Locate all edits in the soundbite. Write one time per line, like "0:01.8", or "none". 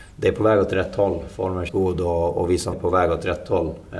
0:01.7
0:02.7